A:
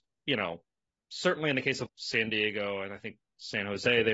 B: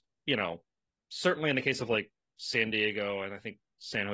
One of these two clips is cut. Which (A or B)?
A